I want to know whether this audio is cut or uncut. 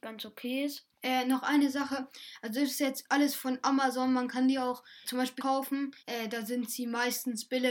cut